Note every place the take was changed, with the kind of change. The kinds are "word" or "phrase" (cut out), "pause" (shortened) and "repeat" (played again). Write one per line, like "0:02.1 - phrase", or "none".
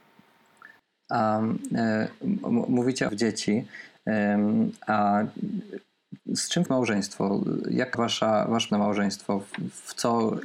0:03.1 - phrase
0:06.2 - pause
0:06.7 - word
0:07.9 - word
0:08.7 - word